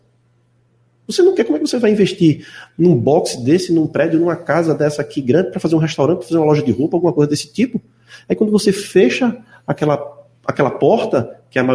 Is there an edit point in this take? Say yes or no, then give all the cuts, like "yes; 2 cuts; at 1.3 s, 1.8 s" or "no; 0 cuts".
no; 0 cuts